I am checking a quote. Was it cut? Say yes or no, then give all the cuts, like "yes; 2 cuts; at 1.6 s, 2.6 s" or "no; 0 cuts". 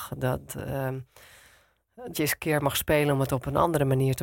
yes; 1 cut; at 2.1 s